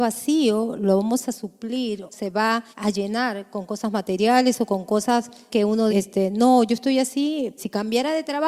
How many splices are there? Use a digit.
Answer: 5